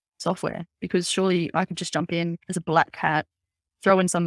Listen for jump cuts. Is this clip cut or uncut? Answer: cut